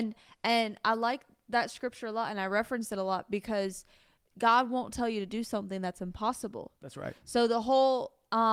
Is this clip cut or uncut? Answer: uncut